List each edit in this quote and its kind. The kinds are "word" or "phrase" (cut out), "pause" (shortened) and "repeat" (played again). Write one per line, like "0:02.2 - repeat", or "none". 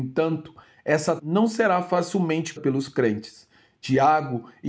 0:01.2 - word
0:02.6 - word

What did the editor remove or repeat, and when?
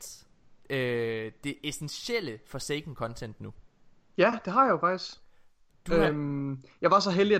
none

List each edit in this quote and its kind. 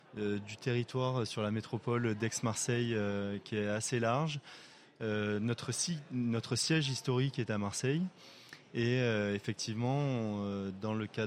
none

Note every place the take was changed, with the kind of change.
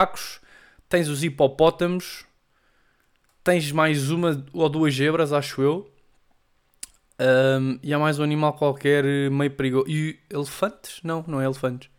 none

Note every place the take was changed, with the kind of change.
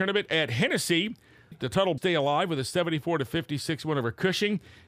0:01.5 - word
0:02.0 - word

